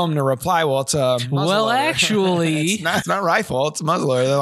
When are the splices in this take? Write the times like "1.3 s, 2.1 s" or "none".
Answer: 3.0 s